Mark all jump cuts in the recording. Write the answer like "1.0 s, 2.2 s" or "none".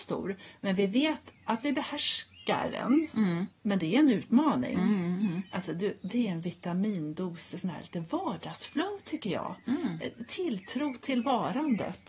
1.3 s, 3.5 s